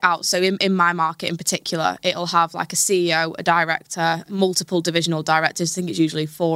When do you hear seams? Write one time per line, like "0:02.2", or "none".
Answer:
none